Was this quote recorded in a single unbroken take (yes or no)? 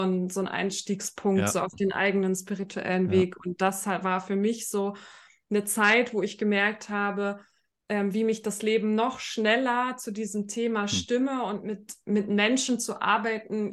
yes